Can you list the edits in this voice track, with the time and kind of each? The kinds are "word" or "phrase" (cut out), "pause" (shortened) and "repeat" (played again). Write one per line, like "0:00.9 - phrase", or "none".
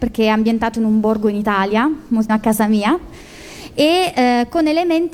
0:02.3 - word